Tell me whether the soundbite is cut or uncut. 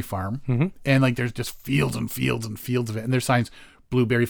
uncut